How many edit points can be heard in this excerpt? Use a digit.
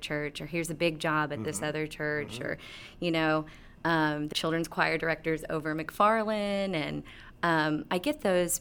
1